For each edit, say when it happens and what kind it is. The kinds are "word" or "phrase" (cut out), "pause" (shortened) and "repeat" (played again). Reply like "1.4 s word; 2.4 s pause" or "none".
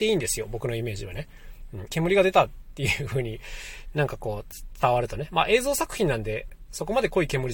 1.9 s word